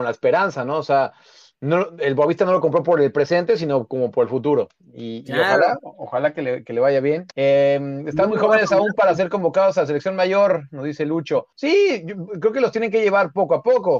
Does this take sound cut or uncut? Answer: cut